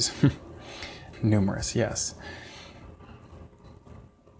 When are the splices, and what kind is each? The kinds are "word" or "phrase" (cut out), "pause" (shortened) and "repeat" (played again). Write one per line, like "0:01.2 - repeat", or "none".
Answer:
0:01.1 - word